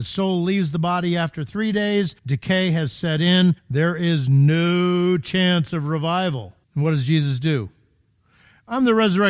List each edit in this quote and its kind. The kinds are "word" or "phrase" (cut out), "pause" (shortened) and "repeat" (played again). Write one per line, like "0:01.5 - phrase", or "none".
0:02.2 - pause
0:03.6 - pause
0:06.6 - pause

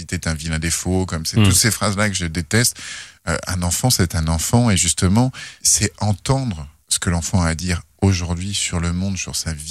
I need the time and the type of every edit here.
none

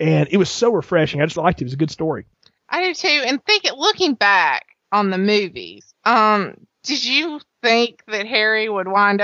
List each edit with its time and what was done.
0:01.4 - word

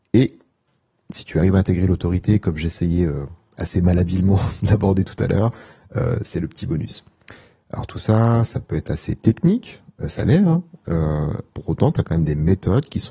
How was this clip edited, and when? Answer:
none

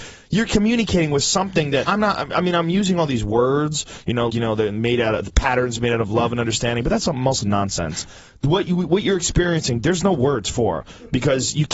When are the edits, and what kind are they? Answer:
0:01.9 - word
0:04.3 - word
0:07.4 - word

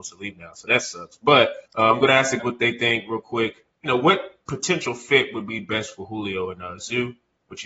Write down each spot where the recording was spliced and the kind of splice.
0:01.7 - pause
0:02.4 - word
0:03.7 - pause

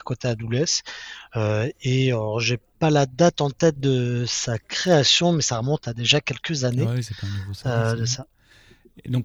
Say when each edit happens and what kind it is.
none

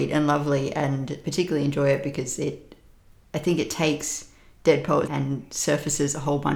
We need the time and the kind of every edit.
0:01.2 - word
0:05.1 - word

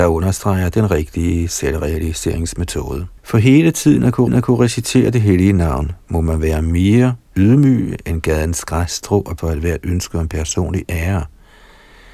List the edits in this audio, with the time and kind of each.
0:03.2 - pause
0:04.3 - repeat
0:09.4 - word

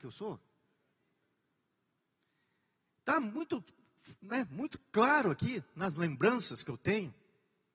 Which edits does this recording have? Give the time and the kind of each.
none

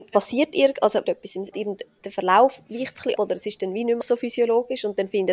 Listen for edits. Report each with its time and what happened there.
0:01.0 - word
0:01.5 - phrase
0:03.2 - word
0:04.0 - word

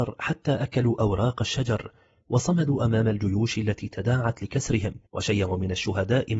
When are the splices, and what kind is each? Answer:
0:05.1 - pause

